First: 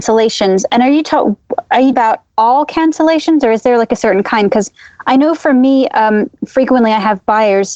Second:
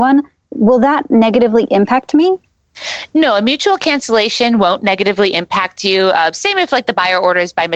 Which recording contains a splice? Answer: first; 1 cut; at 1.9 s

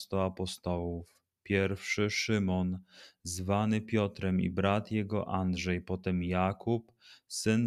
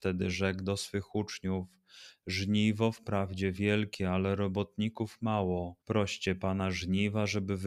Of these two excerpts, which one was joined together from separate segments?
second; 1 cut; at 5.8 s

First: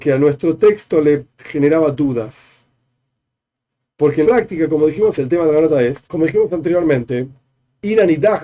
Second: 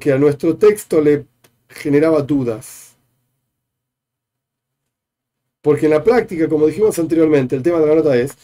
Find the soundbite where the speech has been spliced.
first; 5 cuts; at 1.3 s, 3.3 s, 4.2 s, 5.2 s, 6.0 s

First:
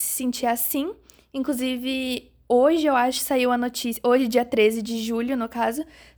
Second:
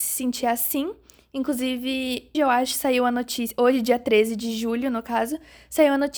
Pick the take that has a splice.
second; 1 cut; at 2.3 s

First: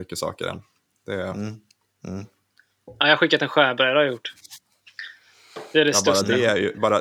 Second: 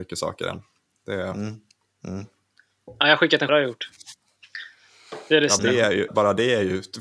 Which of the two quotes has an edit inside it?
second; 3 cuts; at 3.5 s, 5.6 s, 6.1 s

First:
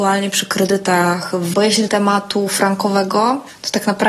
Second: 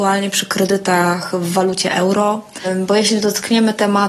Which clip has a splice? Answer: first; 2 cuts; at 1.5 s, 1.9 s

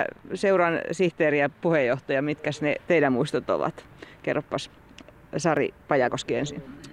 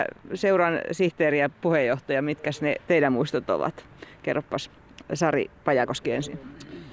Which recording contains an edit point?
second; 1 cut; at 5.0 s

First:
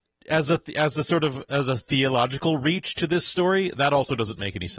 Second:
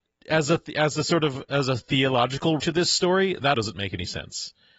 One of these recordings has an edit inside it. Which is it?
second; 2 cuts; at 2.6 s, 3.5 s

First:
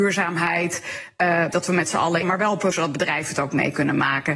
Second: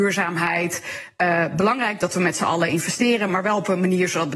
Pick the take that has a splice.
first; 3 cuts; at 1.5 s, 2.2 s, 2.7 s

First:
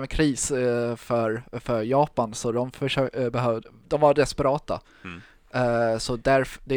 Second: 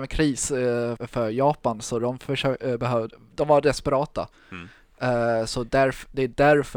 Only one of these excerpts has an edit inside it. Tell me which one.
second; 1 cut; at 1.0 s

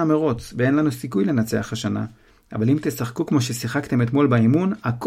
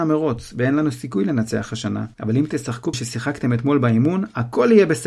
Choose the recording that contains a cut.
second; 2 cuts; at 2.1 s, 2.9 s

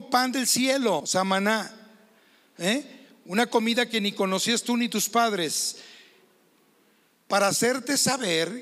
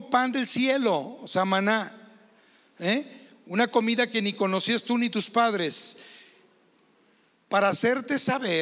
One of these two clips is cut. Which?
first; 1 cut; at 1.0 s

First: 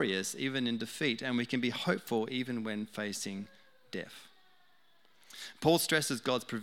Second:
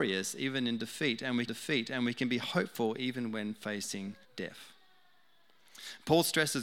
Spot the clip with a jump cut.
second; 2 cuts; at 1.5 s, 4.2 s

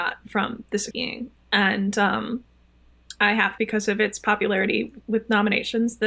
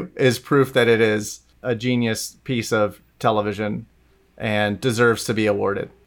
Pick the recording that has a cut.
first; 2 cuts; at 0.9 s, 3.6 s

